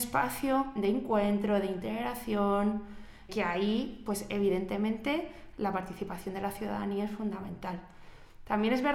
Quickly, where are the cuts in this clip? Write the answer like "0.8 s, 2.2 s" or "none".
3.3 s